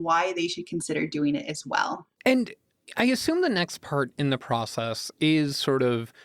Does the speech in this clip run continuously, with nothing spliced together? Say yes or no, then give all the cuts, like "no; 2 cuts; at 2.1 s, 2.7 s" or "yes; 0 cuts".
no; 1 cut; at 2.1 s